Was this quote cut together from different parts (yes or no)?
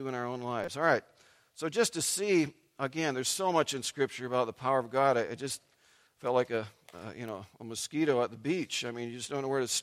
no